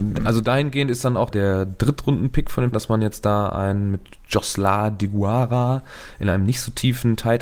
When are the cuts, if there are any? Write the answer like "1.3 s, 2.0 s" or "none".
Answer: 1.3 s, 2.7 s